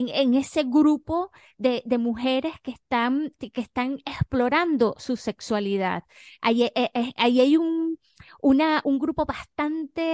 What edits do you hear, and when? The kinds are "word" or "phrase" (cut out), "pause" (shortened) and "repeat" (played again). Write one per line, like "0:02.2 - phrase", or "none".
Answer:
0:08.8 - word